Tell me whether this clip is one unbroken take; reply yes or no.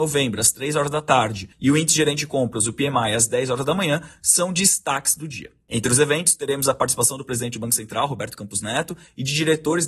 no